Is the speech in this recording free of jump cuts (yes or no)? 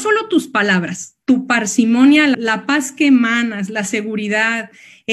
no